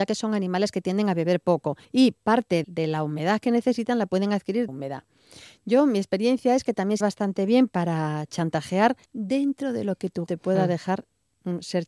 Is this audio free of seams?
no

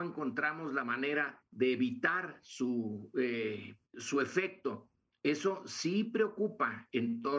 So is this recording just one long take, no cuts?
no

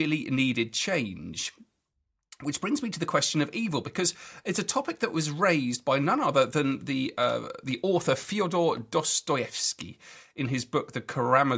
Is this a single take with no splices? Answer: yes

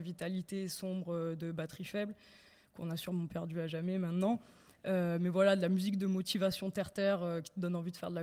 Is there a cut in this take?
no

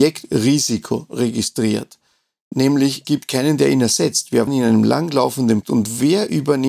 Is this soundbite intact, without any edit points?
no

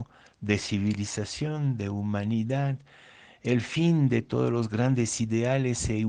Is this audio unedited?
yes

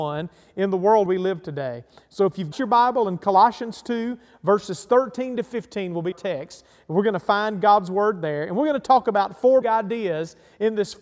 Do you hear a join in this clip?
yes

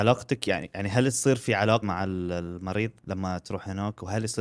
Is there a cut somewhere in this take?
yes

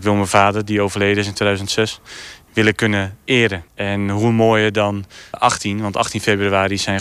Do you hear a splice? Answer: yes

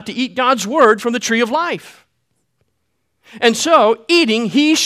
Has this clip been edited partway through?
no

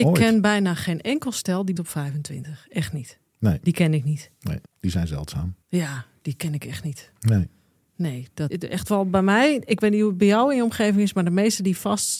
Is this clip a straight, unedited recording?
no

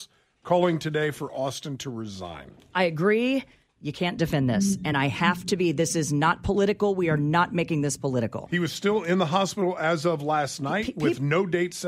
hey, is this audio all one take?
yes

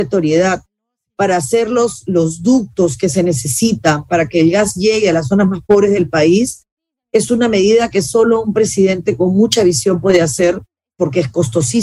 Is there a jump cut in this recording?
no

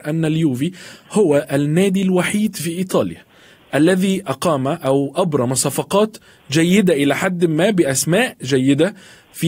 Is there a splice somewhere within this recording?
no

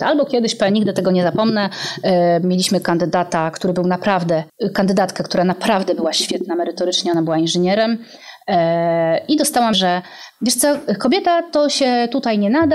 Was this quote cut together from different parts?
yes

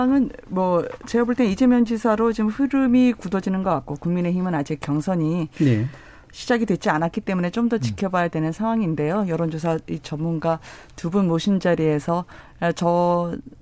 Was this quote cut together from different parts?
no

